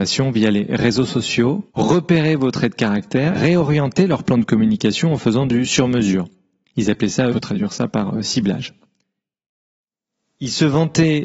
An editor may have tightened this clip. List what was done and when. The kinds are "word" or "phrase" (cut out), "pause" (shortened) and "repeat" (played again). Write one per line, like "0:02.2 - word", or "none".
0:01.7 - pause
0:03.3 - word
0:07.3 - phrase